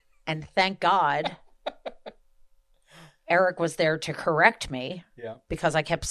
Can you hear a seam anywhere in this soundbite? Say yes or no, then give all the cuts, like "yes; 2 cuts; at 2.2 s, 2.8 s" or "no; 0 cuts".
no; 0 cuts